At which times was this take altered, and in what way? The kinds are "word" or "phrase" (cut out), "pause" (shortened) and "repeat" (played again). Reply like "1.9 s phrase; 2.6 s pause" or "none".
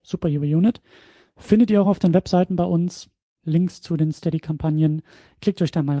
none